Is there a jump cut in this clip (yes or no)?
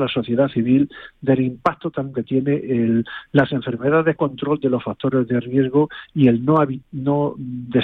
yes